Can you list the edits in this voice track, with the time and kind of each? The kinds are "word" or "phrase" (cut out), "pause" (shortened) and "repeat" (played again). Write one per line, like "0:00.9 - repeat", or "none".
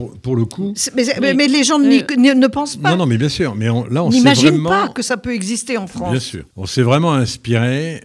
0:06.5 - pause